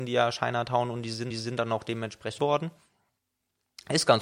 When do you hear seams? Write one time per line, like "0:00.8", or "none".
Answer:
0:01.3
0:02.4